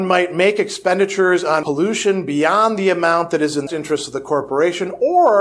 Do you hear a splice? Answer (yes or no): yes